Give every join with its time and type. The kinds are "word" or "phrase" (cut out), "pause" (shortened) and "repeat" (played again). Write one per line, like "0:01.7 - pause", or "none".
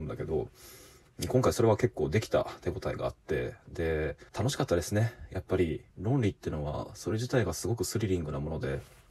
0:04.3 - pause
0:05.9 - pause